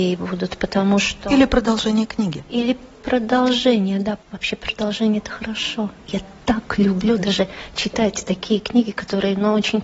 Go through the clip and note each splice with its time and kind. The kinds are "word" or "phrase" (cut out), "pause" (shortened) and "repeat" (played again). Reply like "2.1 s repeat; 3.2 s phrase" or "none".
none

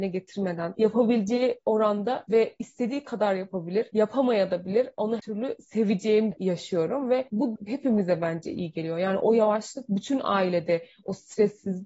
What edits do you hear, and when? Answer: 5.2 s word; 6.3 s word; 7.6 s word

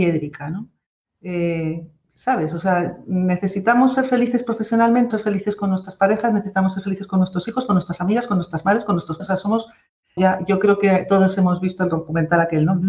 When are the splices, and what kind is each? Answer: 5.1 s word; 9.2 s word; 10.2 s phrase

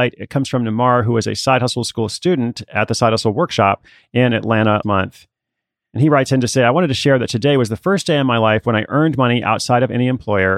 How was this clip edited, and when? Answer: 4.8 s word

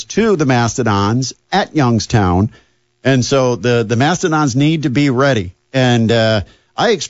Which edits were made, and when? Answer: none

